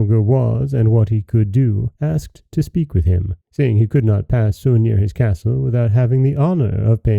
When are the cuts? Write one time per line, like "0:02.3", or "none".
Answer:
0:01.9
0:03.4